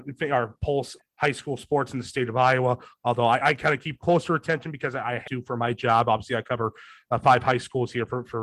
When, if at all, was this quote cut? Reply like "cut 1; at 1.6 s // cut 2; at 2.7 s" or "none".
cut 1; at 1.0 s // cut 2; at 3.4 s // cut 3; at 5.2 s